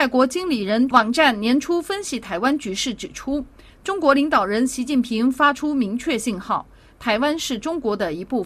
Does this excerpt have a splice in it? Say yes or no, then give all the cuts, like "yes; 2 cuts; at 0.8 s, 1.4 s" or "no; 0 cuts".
no; 0 cuts